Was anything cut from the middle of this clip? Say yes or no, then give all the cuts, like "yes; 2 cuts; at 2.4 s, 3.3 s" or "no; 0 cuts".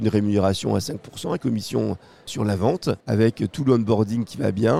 yes; 3 cuts; at 1.4 s, 2.3 s, 3.0 s